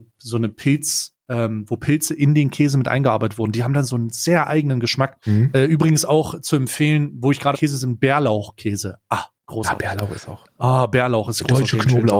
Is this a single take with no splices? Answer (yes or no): no